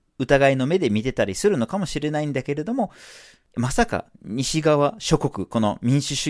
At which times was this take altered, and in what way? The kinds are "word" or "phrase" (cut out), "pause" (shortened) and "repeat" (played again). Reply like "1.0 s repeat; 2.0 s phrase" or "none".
none